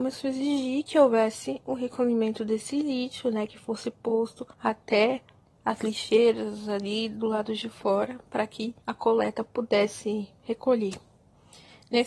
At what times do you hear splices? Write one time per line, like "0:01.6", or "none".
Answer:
0:04.5
0:08.8